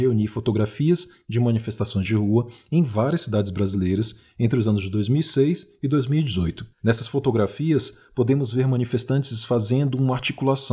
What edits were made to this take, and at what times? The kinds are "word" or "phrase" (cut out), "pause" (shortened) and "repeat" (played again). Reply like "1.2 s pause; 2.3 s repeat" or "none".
6.7 s pause